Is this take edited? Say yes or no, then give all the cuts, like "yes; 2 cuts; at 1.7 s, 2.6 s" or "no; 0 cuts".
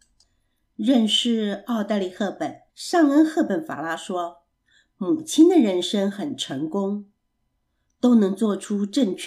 yes; 2 cuts; at 2.7 s, 4.5 s